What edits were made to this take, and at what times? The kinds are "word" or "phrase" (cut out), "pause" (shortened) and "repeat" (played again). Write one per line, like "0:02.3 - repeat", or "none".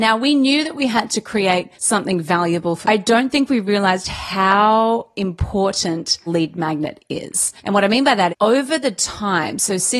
0:01.7 - pause
0:02.8 - phrase
0:06.3 - word
0:07.6 - pause
0:08.3 - word